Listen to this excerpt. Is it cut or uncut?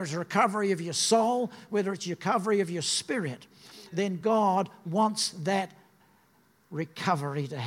uncut